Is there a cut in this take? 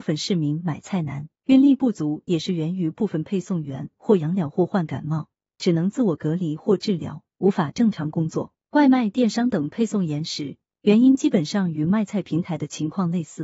yes; 1 cut; at 1.4 s

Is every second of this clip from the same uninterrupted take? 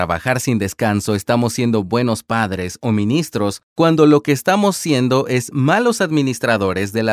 yes; 0 cuts

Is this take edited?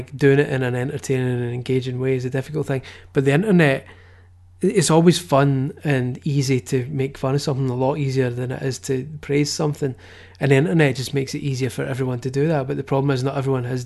no; 0 cuts

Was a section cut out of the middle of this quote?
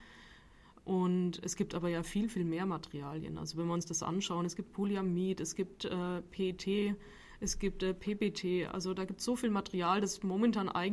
no; 0 cuts

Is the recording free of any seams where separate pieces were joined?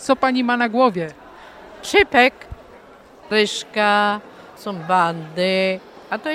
no; 2 cuts; at 3.3 s, 4.6 s

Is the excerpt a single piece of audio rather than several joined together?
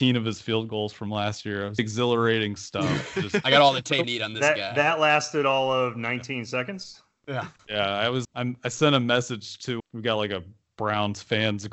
no; 4 cuts; at 1.8 s, 4.0 s, 8.2 s, 9.8 s

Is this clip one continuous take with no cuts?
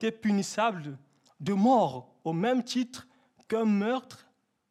yes; 0 cuts

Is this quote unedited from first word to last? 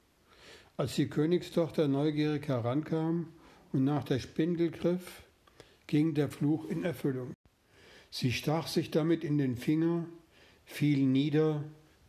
yes; 0 cuts

